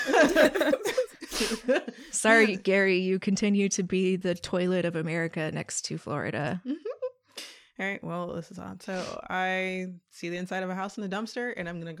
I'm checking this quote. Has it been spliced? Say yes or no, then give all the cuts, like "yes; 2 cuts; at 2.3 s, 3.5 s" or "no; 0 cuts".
no; 0 cuts